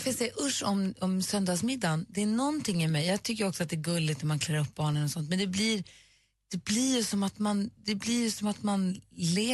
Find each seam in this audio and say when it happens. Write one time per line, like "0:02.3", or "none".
none